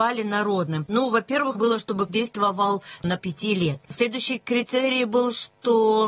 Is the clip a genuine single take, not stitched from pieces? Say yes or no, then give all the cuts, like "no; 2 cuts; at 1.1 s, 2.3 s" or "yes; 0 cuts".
no; 3 cuts; at 1.5 s, 2.1 s, 3.2 s